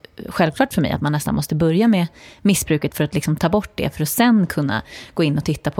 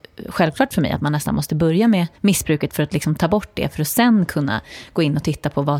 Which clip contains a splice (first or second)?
second